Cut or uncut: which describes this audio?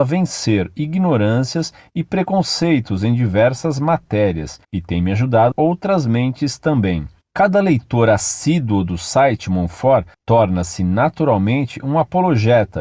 cut